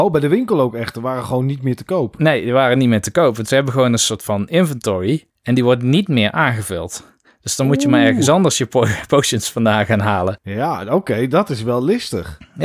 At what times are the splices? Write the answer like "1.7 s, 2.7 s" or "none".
none